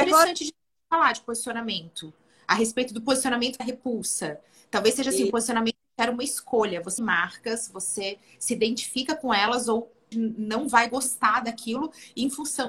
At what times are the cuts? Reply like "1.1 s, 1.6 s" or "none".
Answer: 3.6 s, 7.0 s, 10.1 s